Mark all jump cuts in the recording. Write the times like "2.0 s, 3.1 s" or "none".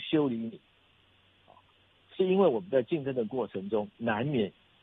none

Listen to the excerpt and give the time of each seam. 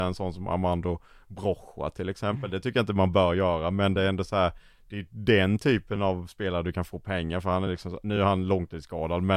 none

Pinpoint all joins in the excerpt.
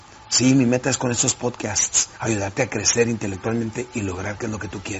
2.1 s

